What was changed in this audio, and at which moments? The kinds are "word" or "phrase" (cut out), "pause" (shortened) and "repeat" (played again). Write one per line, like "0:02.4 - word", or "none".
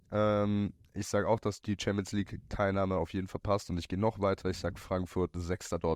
0:01.6 - word
0:03.3 - word
0:04.8 - word